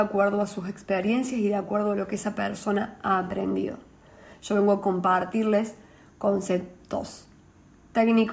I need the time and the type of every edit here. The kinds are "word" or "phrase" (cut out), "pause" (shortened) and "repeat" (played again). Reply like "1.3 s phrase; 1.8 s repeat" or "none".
none